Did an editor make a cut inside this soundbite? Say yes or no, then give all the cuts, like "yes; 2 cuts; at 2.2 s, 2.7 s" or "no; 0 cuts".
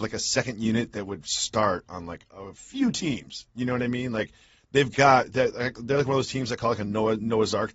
no; 0 cuts